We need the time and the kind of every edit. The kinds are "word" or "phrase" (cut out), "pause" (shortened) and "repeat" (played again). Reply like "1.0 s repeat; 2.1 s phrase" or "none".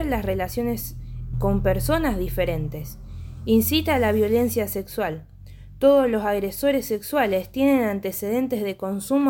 1.3 s word